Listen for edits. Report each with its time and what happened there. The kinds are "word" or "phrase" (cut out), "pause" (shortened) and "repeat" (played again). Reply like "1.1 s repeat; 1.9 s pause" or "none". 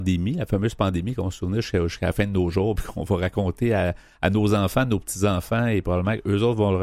none